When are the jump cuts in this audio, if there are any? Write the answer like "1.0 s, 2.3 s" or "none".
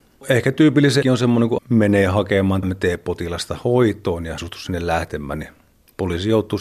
1.0 s, 1.6 s, 2.6 s, 4.4 s